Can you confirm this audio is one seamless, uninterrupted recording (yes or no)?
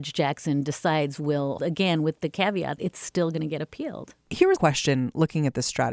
no